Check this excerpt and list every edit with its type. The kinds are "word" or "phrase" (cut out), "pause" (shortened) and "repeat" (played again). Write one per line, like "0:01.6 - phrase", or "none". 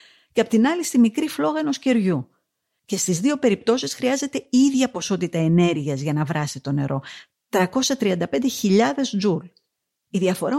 none